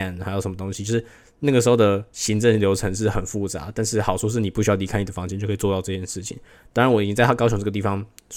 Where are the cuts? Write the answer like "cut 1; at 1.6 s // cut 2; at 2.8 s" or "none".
none